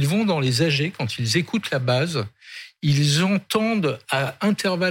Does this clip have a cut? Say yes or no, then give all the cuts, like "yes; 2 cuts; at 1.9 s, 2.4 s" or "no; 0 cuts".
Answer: no; 0 cuts